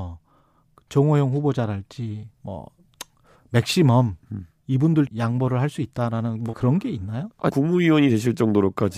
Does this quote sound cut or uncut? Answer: cut